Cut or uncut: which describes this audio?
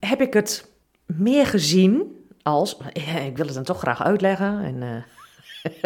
uncut